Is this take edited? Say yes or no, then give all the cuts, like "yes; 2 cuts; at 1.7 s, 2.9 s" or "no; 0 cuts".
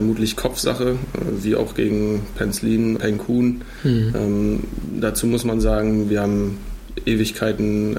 yes; 1 cut; at 3.0 s